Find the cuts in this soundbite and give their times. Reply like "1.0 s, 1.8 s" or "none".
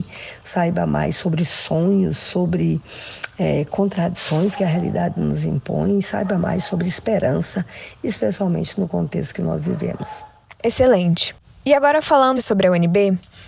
12.4 s